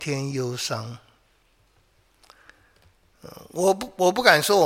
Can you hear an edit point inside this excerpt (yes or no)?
no